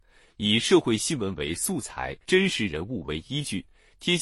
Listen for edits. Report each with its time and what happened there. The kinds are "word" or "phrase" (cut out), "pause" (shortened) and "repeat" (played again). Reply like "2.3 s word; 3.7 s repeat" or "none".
2.2 s pause